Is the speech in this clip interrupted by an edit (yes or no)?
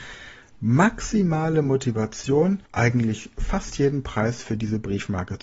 yes